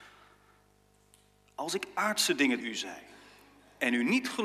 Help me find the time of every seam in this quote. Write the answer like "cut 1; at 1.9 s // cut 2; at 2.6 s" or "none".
cut 1; at 2.6 s

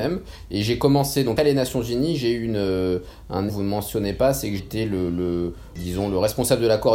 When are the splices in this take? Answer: cut 1; at 1.4 s // cut 2; at 3.5 s // cut 3; at 4.6 s

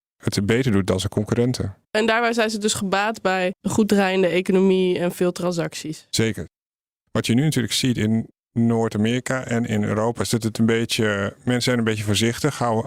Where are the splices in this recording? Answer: cut 1; at 1.8 s

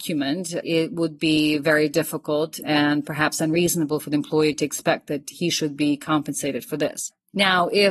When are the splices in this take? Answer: none

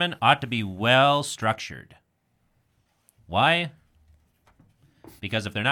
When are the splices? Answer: none

